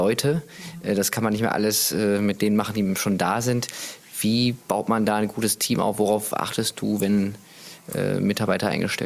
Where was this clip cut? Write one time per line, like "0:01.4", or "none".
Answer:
0:04.6